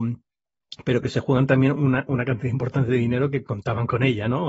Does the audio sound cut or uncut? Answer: uncut